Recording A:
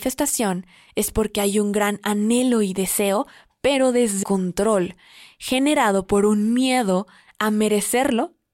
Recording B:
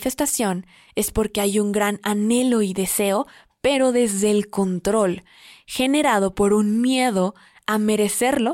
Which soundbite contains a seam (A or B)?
A